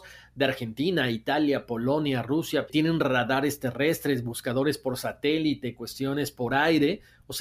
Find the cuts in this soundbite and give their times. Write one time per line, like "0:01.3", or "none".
0:02.7